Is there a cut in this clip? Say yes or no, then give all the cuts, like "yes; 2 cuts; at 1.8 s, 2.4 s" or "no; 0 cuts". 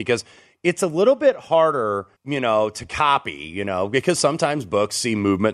yes; 1 cut; at 2.2 s